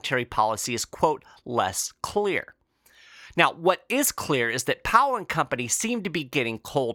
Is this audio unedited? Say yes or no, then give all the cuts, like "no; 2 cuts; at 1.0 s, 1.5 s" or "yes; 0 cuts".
yes; 0 cuts